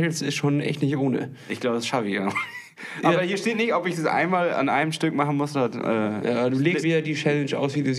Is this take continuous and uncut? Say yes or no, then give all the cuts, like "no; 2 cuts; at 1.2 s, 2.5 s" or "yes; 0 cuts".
no; 1 cut; at 6.8 s